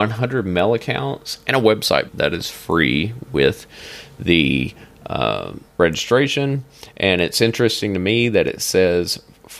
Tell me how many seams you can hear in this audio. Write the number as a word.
two